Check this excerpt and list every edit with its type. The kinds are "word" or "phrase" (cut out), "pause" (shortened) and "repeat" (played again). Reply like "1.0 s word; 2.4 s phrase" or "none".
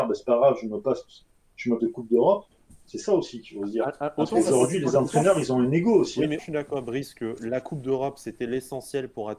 1.8 s word; 6.4 s word; 6.7 s word